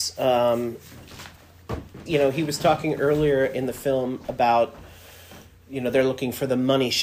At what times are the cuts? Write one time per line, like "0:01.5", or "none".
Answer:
0:02.1